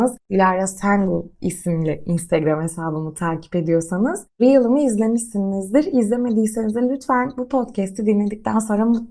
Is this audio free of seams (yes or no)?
yes